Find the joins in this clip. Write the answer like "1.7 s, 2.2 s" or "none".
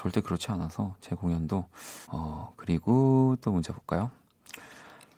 2.0 s